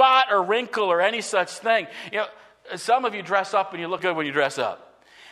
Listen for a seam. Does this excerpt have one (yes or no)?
yes